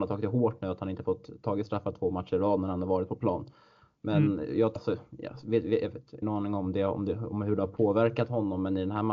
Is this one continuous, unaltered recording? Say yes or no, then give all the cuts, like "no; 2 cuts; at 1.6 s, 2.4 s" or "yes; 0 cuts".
no; 2 cuts; at 4.8 s, 6.2 s